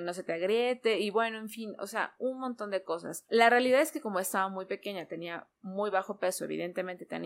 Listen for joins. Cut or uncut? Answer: uncut